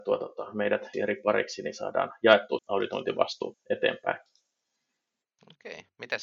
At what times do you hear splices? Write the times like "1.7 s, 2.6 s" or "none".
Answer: 0.9 s, 2.6 s, 3.5 s